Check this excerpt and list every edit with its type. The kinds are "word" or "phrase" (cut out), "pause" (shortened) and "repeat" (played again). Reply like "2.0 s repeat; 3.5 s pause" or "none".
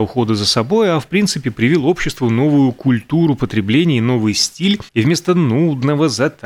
4.9 s pause